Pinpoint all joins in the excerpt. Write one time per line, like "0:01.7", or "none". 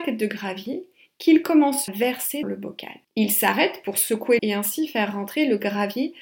0:01.9
0:02.4
0:03.0
0:04.4